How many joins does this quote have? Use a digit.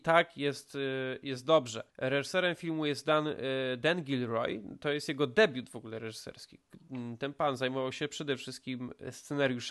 1